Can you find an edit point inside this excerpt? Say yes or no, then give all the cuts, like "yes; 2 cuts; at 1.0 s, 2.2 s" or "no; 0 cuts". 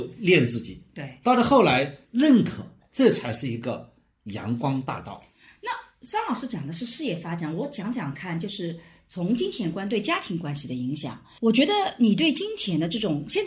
yes; 1 cut; at 2.0 s